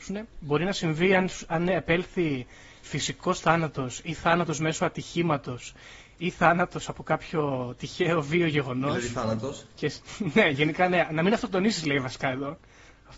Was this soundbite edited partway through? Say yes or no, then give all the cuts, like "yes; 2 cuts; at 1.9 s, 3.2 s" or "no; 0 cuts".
no; 0 cuts